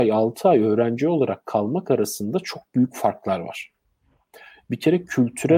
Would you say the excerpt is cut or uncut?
uncut